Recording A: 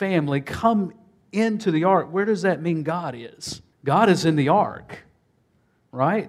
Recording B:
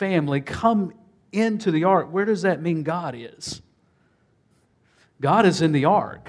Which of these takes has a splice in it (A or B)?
A